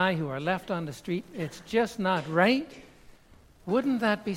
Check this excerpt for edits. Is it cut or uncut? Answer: uncut